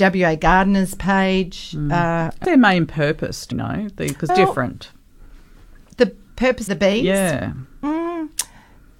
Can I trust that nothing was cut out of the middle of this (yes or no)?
no